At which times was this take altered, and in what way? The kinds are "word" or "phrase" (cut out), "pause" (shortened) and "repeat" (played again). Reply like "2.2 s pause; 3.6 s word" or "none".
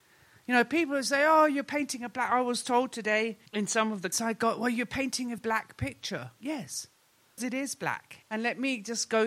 3.5 s pause; 4.1 s word; 5.4 s word; 7.4 s word; 8.2 s pause

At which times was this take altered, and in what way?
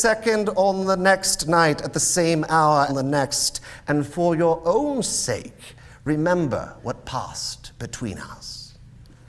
2.9 s phrase

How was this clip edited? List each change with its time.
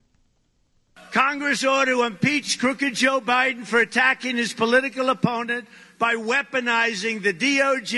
none

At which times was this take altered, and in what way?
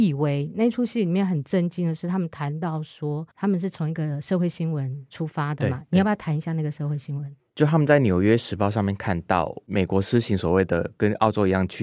3.3 s pause

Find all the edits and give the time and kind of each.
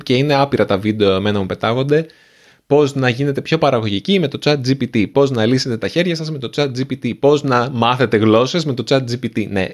none

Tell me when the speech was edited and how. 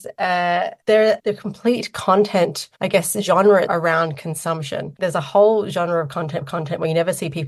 1.2 s word; 2.7 s pause; 3.7 s phrase; 6.4 s repeat

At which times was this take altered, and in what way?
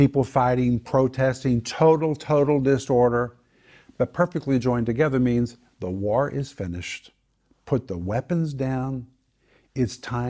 none

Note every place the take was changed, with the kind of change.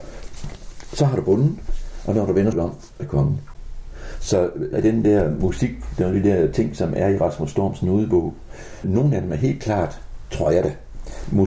2.5 s word; 3.0 s phrase; 4.7 s phrase; 8.8 s word

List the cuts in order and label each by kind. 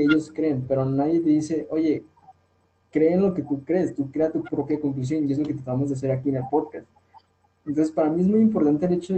none

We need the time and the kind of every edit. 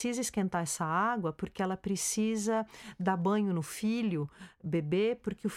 none

